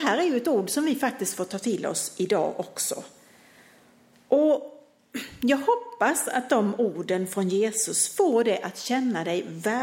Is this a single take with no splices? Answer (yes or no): yes